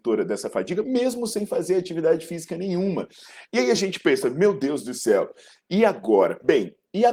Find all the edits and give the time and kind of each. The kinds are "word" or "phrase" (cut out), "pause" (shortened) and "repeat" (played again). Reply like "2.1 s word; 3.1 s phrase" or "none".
none